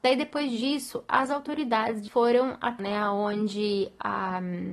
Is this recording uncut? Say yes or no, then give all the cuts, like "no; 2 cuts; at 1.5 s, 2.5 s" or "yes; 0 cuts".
no; 2 cuts; at 2.1 s, 2.8 s